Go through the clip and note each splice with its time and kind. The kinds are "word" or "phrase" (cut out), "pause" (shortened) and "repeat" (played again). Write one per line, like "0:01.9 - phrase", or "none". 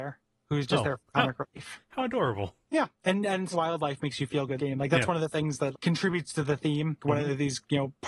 0:02.6 - pause
0:03.5 - word
0:04.6 - word
0:05.7 - word
0:07.0 - word

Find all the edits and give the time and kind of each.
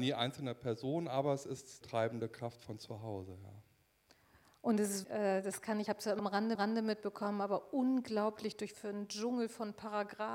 0:01.8 - phrase
0:05.0 - word
0:05.9 - word
0:06.2 - word
0:06.5 - repeat
0:08.7 - word

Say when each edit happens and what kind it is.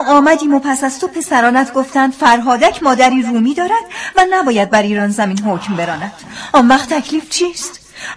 none

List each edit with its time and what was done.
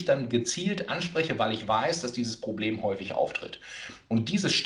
none

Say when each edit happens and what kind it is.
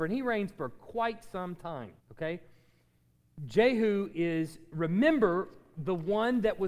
0:02.0 - pause

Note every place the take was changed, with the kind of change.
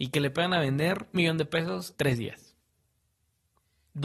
0:01.1 - word
0:01.9 - word

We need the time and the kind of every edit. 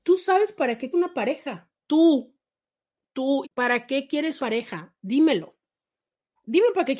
0:00.9 - word
0:01.8 - pause
0:03.4 - word
0:04.4 - word

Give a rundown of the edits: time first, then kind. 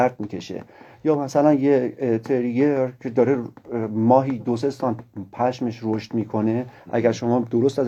none

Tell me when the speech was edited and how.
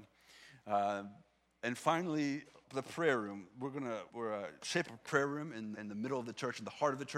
0:02.6 - word
0:04.1 - word
0:04.9 - word
0:05.7 - word

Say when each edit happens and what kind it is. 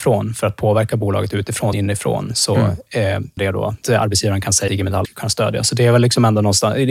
0:01.7 - phrase
0:03.4 - word
0:03.8 - phrase
0:04.7 - phrase
0:05.0 - word

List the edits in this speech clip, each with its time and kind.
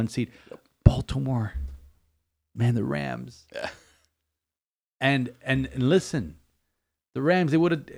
none

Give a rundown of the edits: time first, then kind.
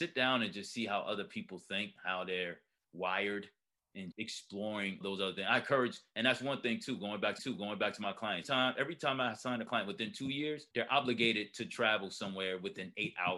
0:02.0 - word
0:04.1 - word
0:05.0 - word
0:07.4 - repeat
0:08.4 - word
0:10.7 - pause

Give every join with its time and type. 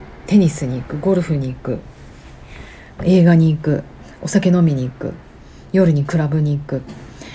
0:03.0 - phrase

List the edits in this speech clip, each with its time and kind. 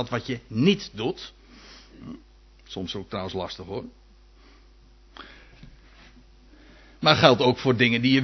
none

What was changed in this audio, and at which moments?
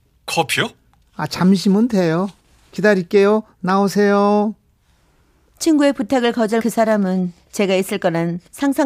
0:06.6 - word

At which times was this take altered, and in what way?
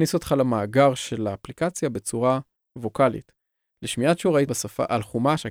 0:04.5 - word

